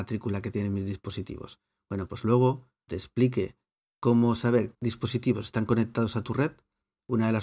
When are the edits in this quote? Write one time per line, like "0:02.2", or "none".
0:02.9
0:04.7